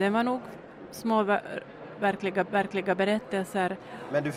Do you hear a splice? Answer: yes; 1 cut; at 2.5 s

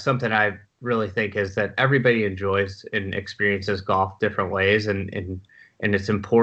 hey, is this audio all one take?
yes; 0 cuts

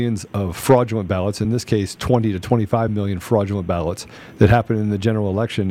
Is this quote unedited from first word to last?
yes; 0 cuts

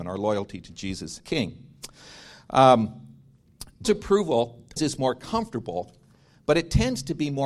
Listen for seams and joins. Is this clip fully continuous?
no; 3 cuts; at 1.2 s, 3.8 s, 4.8 s

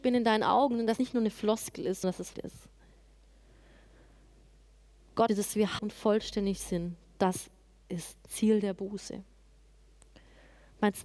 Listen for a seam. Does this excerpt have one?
yes; 6 cuts; at 1.0 s, 2.0 s, 2.3 s, 5.3 s, 5.8 s, 8.3 s

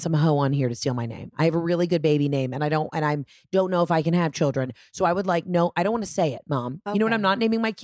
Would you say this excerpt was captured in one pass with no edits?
yes; 0 cuts

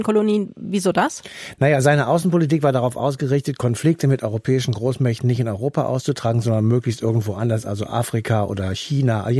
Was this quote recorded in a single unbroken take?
yes; 0 cuts

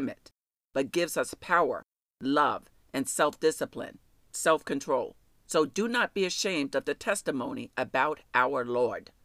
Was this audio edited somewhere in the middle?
no; 0 cuts

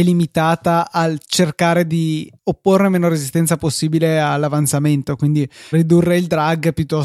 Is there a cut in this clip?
yes; 2 cuts; at 2.4 s, 5.7 s

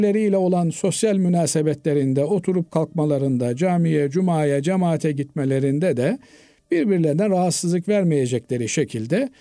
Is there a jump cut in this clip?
no; 0 cuts

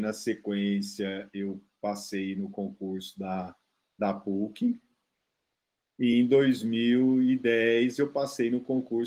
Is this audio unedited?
yes; 0 cuts

